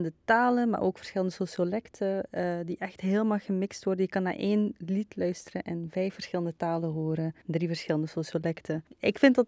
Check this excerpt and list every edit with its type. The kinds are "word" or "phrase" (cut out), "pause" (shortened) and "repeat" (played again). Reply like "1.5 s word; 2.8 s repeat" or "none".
7.4 s pause